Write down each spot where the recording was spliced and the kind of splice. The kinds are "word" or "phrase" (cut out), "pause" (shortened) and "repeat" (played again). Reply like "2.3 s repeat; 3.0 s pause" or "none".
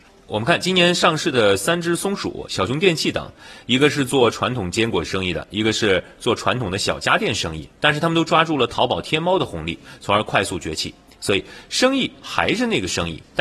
none

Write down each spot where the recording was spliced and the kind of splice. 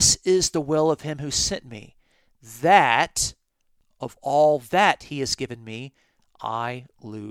none

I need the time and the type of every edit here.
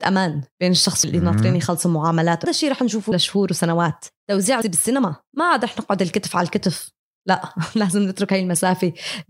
1.0 s word; 2.4 s word; 3.1 s word; 4.6 s word

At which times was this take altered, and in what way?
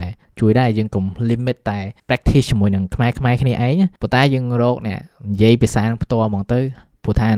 2.0 s pause; 4.0 s pause

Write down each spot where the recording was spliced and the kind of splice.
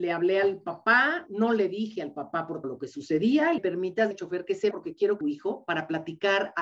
2.6 s word; 3.6 s phrase; 4.1 s word; 4.7 s word; 5.2 s phrase

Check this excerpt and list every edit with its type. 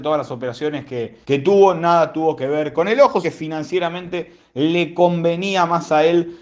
1.2 s pause; 2.7 s word; 3.2 s word

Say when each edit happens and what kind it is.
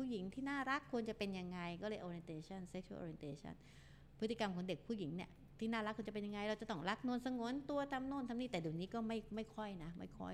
none

